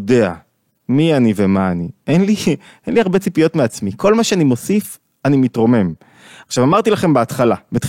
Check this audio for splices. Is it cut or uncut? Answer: uncut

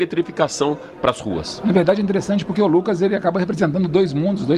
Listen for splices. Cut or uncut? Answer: uncut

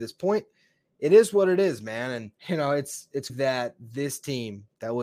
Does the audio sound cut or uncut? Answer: cut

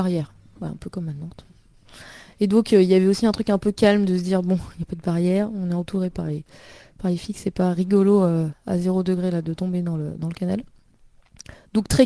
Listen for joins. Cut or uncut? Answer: uncut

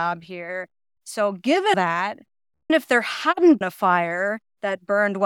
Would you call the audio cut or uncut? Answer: cut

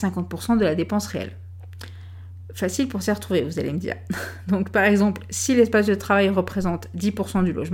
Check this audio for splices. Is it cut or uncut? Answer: uncut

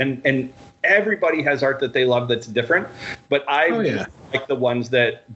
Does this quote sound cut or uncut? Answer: uncut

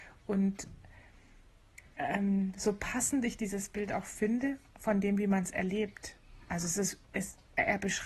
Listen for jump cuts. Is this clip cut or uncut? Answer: uncut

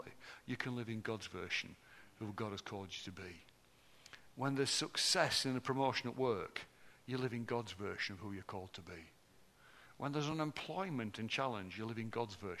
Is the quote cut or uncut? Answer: uncut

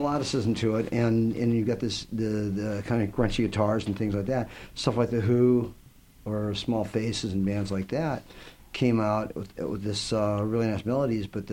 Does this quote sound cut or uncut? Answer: uncut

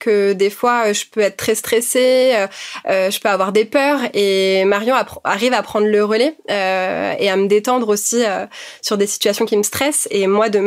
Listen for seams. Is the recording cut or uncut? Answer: uncut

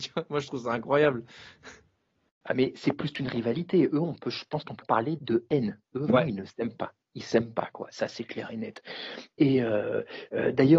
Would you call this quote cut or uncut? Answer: cut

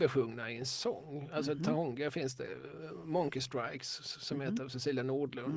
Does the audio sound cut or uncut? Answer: cut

